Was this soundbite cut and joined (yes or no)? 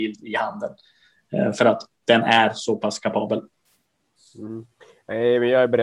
no